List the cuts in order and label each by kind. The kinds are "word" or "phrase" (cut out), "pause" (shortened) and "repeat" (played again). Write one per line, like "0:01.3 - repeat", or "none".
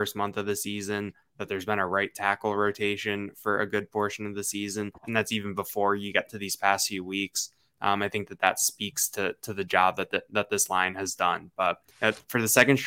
0:05.0 - pause
0:11.9 - pause